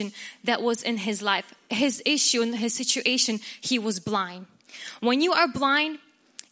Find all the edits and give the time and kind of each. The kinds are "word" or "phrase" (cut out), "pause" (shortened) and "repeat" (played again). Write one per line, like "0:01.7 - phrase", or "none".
none